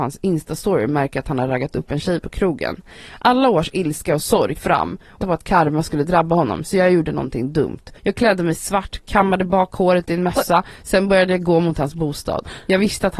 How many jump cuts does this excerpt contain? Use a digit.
3